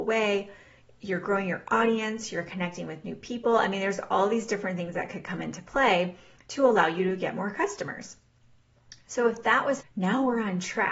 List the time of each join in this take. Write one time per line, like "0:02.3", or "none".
0:09.8